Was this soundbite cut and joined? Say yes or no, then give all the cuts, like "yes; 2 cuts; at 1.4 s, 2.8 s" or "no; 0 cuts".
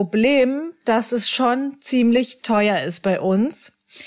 no; 0 cuts